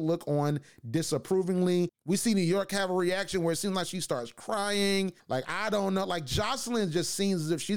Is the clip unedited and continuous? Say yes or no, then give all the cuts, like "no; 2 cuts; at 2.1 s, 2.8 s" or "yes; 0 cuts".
yes; 0 cuts